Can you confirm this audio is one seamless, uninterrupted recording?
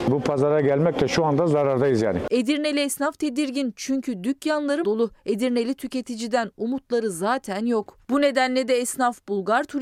no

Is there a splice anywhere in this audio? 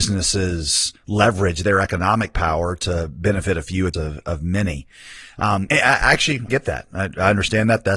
yes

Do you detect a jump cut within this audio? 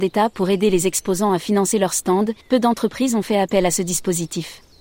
yes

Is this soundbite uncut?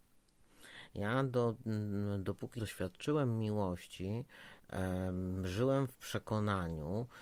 no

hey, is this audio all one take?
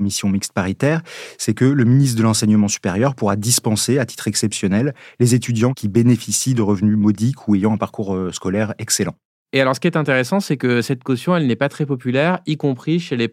yes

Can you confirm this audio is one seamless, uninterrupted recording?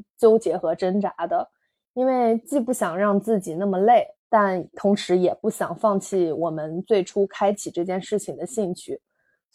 no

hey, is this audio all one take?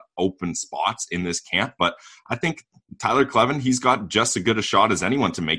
yes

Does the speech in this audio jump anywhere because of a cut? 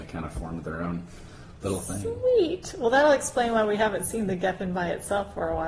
no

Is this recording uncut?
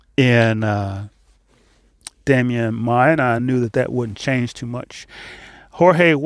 yes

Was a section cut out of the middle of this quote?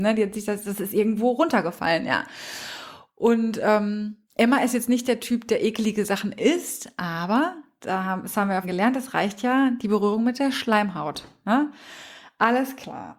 yes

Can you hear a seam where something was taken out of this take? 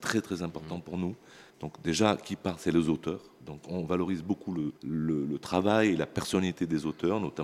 yes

